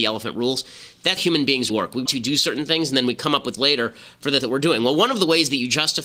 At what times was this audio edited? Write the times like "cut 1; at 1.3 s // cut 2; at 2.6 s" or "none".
cut 1; at 1.2 s // cut 2; at 1.7 s // cut 3; at 2.1 s // cut 4; at 3.6 s // cut 5; at 4.4 s